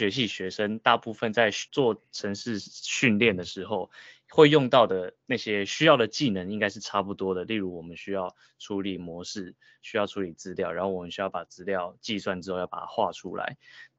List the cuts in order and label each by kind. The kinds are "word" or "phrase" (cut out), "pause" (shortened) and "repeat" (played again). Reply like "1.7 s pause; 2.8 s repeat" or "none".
1.7 s pause